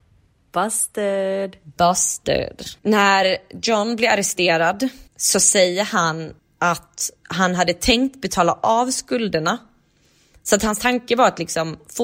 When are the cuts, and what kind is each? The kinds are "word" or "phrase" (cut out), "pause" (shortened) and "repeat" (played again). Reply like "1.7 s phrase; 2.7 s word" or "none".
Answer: 2.8 s pause; 5.1 s pause; 6.4 s pause